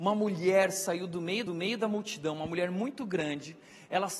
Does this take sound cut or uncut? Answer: cut